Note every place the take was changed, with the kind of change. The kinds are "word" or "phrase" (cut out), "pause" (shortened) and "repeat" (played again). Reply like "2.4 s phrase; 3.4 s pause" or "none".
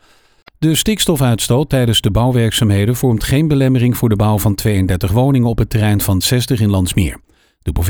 6.2 s phrase